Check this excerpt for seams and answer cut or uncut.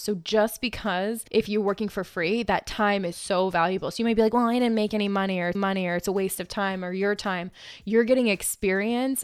cut